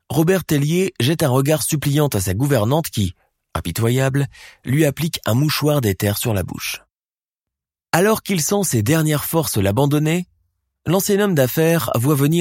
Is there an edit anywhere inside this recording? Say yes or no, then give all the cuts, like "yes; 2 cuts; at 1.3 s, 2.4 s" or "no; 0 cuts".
no; 0 cuts